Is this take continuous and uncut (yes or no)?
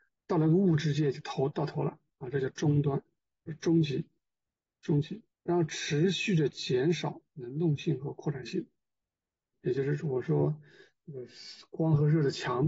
no